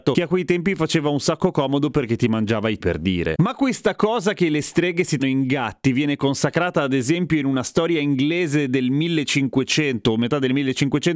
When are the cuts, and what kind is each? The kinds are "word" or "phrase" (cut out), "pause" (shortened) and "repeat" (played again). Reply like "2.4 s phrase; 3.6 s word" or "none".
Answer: 2.8 s word; 5.2 s word